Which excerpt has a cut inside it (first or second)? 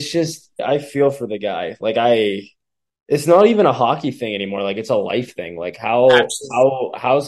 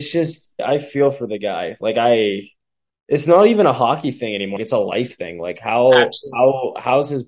second